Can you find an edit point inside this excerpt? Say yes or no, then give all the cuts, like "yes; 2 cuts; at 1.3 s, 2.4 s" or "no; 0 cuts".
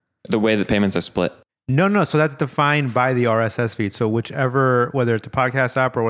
yes; 1 cut; at 1.5 s